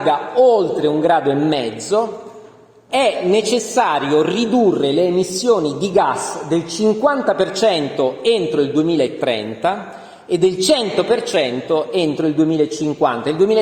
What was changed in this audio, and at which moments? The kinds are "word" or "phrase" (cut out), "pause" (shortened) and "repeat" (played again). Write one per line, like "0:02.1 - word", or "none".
none